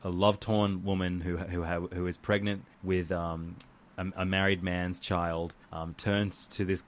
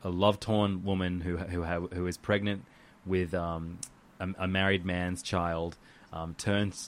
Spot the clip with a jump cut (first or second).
first